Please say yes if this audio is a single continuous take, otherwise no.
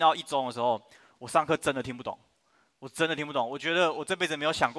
yes